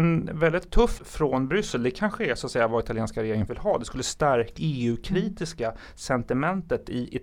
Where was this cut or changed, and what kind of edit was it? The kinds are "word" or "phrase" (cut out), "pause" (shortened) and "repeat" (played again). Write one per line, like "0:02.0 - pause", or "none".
0:01.0 - word
0:03.5 - word
0:04.6 - word